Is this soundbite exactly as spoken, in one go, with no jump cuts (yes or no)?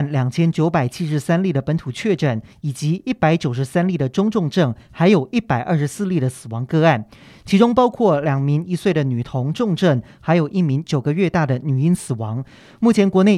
yes